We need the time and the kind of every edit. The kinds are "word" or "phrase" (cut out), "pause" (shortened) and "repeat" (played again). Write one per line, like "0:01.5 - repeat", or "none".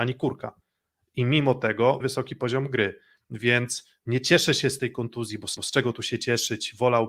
0:02.0 - word
0:05.6 - repeat